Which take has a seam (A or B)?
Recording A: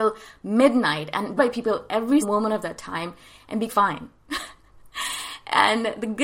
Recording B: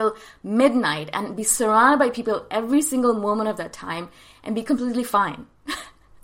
A